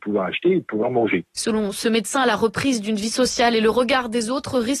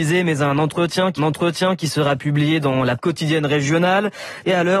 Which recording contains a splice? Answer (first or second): second